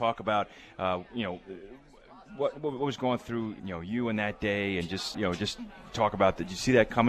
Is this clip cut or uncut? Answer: cut